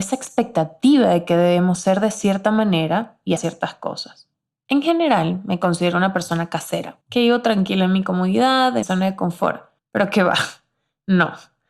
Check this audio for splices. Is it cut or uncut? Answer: cut